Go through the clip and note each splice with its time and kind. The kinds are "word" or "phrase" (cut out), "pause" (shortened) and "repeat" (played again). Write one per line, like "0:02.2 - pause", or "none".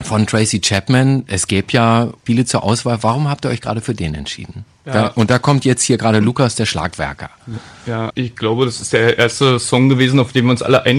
0:02.3 - word
0:04.7 - pause
0:08.1 - word